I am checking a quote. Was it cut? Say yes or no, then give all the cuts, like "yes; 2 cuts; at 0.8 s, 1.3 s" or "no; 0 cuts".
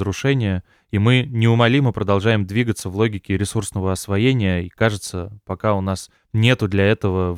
no; 0 cuts